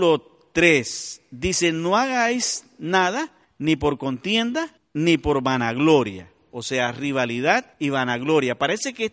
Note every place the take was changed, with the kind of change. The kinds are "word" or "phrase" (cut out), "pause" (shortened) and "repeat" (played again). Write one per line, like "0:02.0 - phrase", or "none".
0:03.4 - pause
0:04.8 - pause
0:07.7 - pause